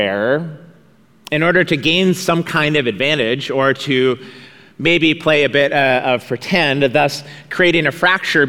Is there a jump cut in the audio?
no; 0 cuts

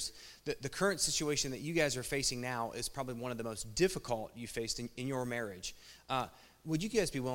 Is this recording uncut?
yes; 0 cuts

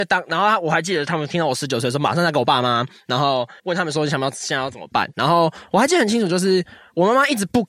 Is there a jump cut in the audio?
yes; 1 cut; at 3.6 s

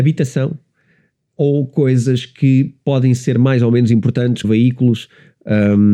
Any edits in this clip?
yes; 1 cut; at 4.4 s

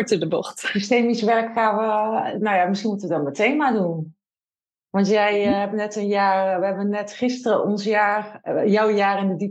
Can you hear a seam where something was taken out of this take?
no; 0 cuts

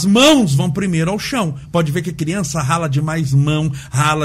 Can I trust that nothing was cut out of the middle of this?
yes; 0 cuts

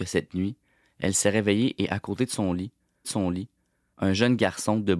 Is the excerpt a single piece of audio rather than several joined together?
no; 1 cut; at 3.0 s

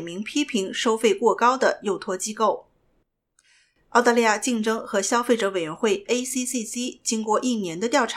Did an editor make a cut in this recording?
no; 0 cuts

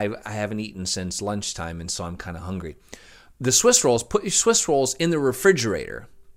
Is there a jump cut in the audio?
no; 0 cuts

